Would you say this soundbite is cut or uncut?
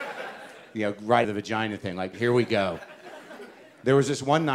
cut